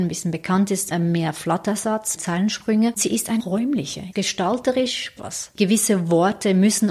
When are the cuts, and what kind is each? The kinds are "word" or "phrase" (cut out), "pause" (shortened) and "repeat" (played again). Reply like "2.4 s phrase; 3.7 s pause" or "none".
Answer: 0.9 s word; 2.2 s word; 3.0 s word; 3.4 s word; 5.2 s word